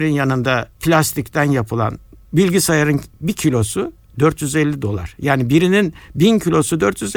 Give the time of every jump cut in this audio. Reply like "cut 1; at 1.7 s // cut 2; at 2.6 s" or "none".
none